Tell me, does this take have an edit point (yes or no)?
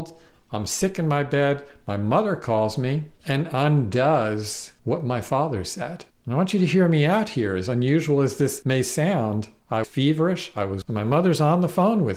yes